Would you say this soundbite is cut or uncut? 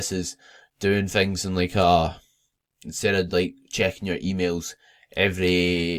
uncut